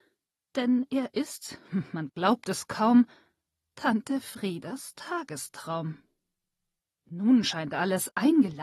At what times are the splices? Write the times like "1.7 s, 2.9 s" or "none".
none